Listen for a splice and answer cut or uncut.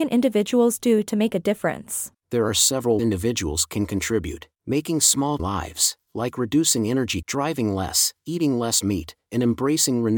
cut